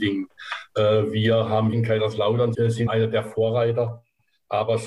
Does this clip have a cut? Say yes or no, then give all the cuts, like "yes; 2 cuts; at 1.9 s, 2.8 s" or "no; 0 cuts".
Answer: yes; 3 cuts; at 1.7 s, 2.5 s, 2.9 s